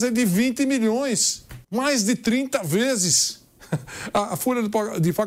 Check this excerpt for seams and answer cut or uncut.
cut